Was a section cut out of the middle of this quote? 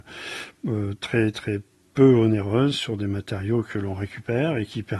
no; 0 cuts

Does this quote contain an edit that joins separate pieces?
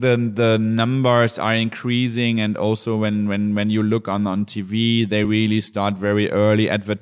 no; 0 cuts

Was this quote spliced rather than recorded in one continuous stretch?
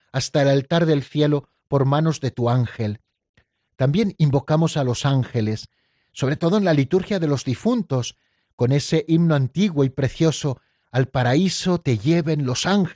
no; 0 cuts

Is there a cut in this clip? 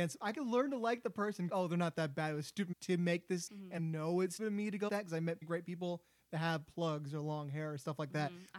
yes; 7 cuts; at 1.5 s, 2.7 s, 3.5 s, 3.8 s, 4.4 s, 4.9 s, 5.4 s

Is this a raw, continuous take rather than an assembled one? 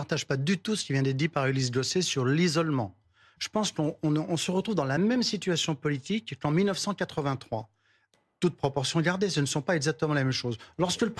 yes; 0 cuts

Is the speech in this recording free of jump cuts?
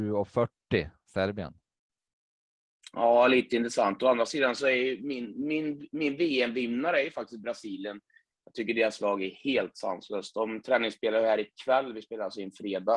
yes; 0 cuts

